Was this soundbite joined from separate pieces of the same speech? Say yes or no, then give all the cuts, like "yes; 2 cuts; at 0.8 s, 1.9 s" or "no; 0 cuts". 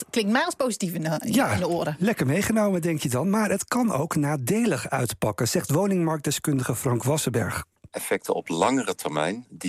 no; 0 cuts